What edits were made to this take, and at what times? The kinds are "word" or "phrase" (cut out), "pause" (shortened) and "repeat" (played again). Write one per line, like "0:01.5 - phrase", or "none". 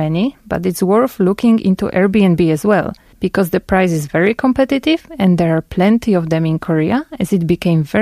0:03.1 - pause